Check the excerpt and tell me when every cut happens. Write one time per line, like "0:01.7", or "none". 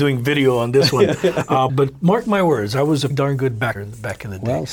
0:01.7
0:03.1
0:03.8